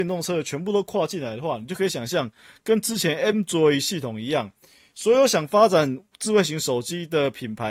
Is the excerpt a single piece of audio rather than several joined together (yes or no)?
yes